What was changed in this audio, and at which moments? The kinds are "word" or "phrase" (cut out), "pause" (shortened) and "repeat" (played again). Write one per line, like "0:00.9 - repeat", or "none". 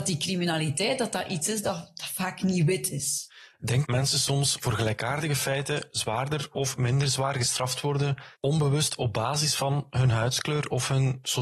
0:03.8 - phrase
0:08.4 - pause